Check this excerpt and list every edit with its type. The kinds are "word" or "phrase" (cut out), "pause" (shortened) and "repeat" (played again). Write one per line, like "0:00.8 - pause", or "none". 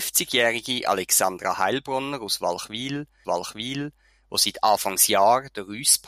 0:03.2 - repeat